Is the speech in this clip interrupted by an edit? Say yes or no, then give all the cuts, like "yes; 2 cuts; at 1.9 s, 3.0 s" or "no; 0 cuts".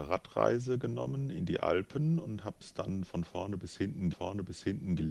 yes; 1 cut; at 4.1 s